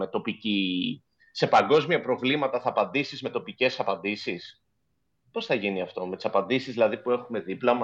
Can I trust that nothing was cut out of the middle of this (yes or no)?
yes